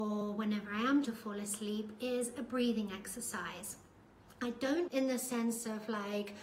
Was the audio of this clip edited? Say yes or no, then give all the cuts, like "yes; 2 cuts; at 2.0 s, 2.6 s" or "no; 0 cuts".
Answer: yes; 2 cuts; at 1.0 s, 4.9 s